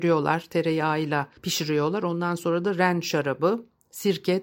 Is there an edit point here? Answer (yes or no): yes